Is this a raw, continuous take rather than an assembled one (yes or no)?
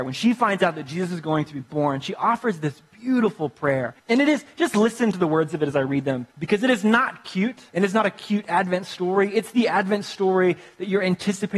no